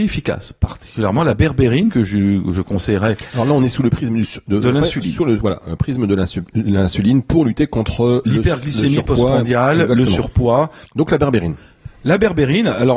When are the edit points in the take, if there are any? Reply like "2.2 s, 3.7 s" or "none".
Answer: 10.9 s

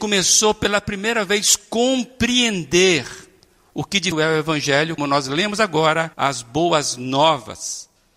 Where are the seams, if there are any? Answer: 4.1 s, 5.0 s, 6.1 s

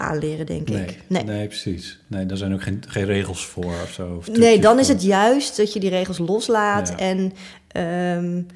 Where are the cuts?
none

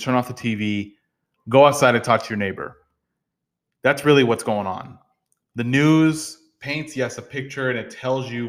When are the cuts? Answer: none

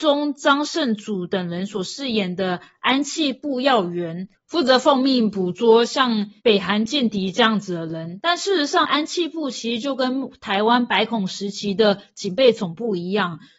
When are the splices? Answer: 6.4 s, 8.8 s

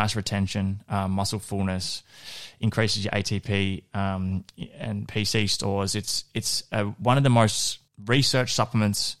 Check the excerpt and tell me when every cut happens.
7.9 s

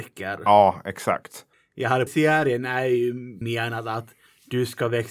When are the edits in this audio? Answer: 2.1 s, 3.4 s

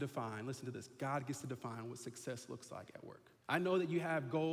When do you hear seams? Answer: 3.4 s

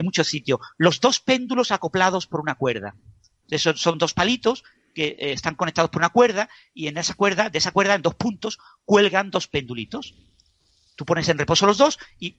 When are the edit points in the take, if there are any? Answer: none

